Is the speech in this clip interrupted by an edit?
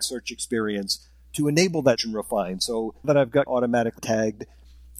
yes; 4 cuts; at 2.0 s, 3.0 s, 3.5 s, 4.0 s

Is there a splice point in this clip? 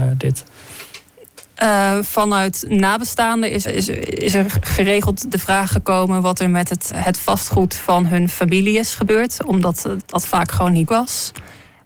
yes; 5 cuts; at 3.6 s, 5.3 s, 6.9 s, 10.0 s, 10.9 s

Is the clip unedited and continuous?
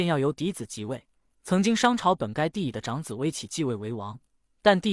yes; 0 cuts

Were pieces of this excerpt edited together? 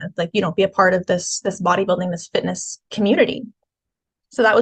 yes; 1 cut; at 2.9 s

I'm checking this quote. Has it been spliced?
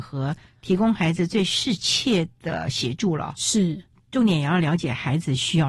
no; 0 cuts

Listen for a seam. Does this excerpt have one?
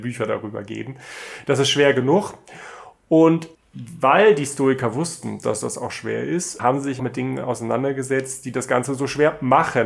yes; 3 cuts; at 3.5 s, 6.6 s, 7.0 s

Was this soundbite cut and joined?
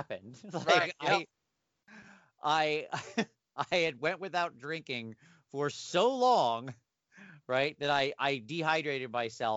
no; 0 cuts

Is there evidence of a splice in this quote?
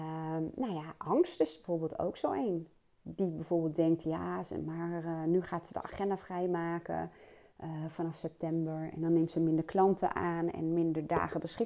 yes; 1 cut; at 2.8 s

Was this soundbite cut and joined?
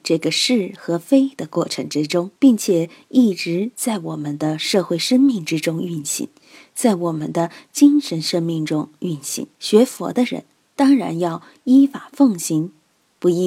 yes; 2 cuts; at 2.4 s, 9.5 s

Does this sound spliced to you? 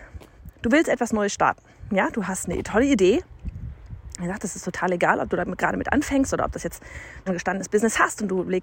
yes; 1 cut; at 7.3 s

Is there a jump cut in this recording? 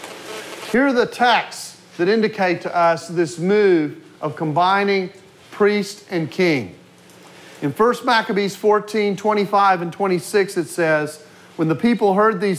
no; 0 cuts

